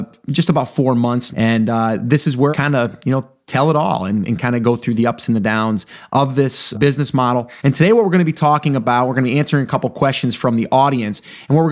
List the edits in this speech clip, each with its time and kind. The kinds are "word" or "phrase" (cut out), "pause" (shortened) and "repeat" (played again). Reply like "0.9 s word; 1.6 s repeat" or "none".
1.3 s word; 2.5 s word; 6.7 s word; 7.6 s pause

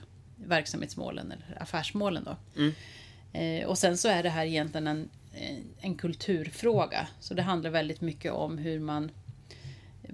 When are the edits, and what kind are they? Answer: none

